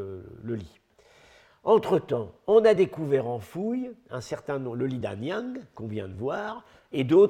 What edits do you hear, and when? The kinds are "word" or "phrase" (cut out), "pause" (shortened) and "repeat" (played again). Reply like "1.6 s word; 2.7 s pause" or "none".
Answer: none